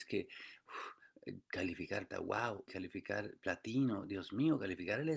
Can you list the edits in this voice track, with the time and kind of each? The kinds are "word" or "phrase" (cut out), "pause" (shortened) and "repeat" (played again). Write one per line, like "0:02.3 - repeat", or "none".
0:02.1 - word
0:02.7 - word

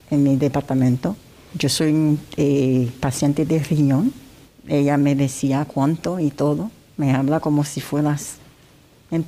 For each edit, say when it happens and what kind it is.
0:03.5 - word

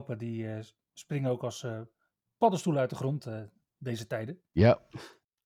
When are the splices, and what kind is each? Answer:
none

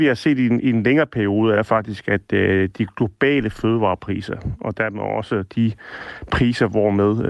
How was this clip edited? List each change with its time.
none

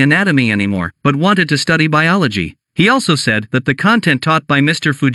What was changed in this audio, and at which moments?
0:01.0 - pause
0:02.6 - pause

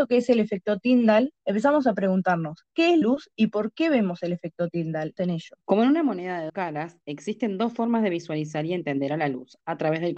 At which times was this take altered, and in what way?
0:01.4 - pause
0:03.0 - word
0:05.2 - phrase
0:05.6 - pause
0:06.5 - word

